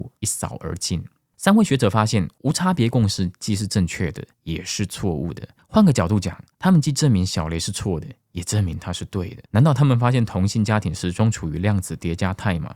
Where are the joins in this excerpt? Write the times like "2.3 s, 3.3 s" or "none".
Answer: 9.5 s